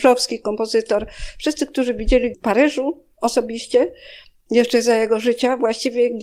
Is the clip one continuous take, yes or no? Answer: no